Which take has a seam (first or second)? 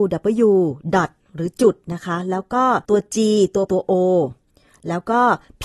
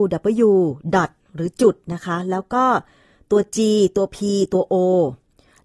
first